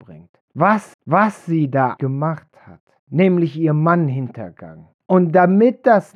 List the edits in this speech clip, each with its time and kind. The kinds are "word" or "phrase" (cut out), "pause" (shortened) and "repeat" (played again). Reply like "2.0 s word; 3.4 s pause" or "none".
0.9 s repeat; 2.0 s word